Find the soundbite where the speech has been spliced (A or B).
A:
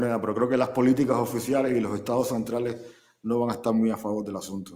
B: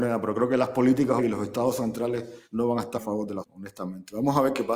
B